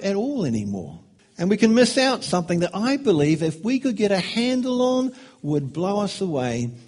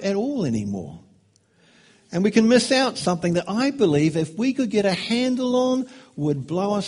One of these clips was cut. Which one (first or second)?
first